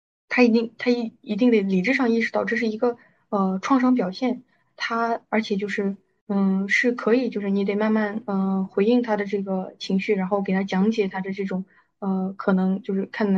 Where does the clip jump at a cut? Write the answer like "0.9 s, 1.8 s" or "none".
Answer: none